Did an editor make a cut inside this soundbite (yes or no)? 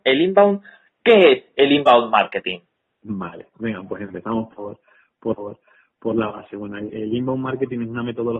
yes